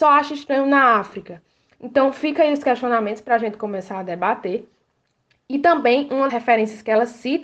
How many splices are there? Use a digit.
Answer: 1